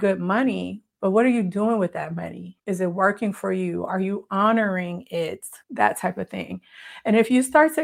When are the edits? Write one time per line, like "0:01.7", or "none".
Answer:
0:02.6
0:05.6